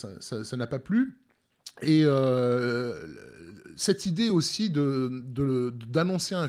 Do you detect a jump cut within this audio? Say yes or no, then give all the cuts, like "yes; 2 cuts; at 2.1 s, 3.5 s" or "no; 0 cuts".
no; 0 cuts